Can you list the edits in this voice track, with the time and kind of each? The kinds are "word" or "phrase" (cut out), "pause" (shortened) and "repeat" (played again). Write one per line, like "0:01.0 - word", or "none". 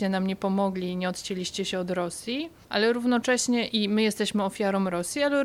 0:02.6 - pause